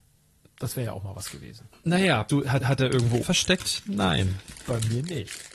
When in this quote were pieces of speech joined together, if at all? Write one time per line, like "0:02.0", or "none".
0:02.3
0:02.6
0:03.2